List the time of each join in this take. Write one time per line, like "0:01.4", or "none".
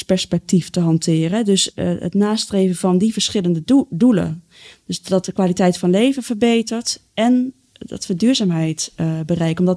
none